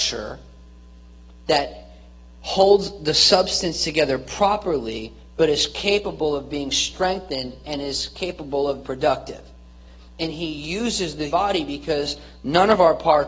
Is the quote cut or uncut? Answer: cut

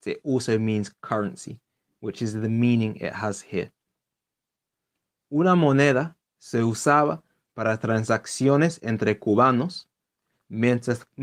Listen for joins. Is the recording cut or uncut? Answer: uncut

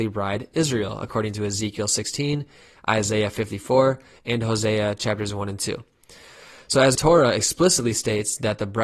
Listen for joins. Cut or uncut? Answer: cut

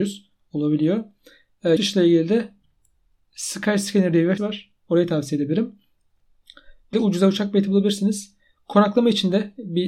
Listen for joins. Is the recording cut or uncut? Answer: cut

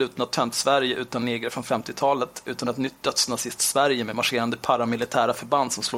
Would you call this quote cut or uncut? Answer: uncut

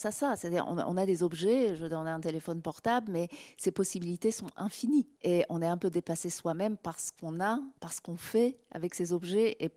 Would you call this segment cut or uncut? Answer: cut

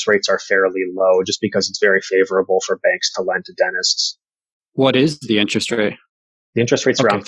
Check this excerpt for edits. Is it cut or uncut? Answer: uncut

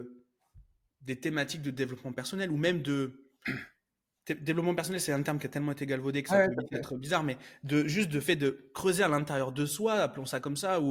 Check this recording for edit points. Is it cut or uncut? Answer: uncut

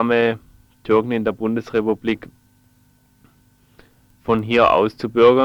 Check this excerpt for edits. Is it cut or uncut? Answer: uncut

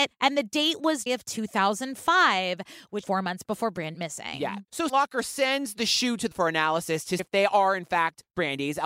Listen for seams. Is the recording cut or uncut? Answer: cut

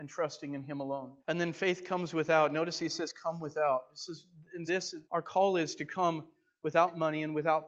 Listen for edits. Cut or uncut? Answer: cut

